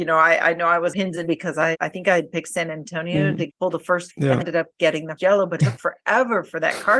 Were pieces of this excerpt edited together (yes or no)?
yes